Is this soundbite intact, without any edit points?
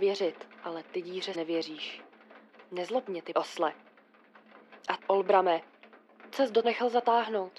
no; 5 cuts; at 1.3 s, 3.3 s, 5.0 s, 6.3 s, 6.6 s

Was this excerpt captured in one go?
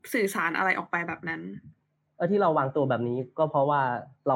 no; 1 cut; at 1.8 s

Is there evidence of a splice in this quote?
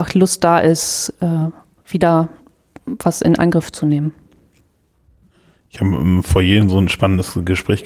no; 0 cuts

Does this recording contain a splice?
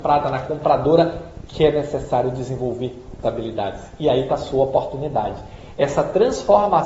yes; 1 cut; at 3.2 s

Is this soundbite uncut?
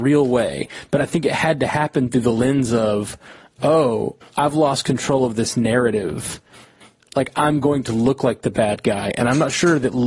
yes; 0 cuts

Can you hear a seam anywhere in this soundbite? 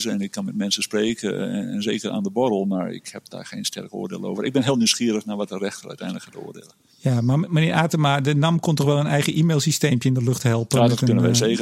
no; 0 cuts

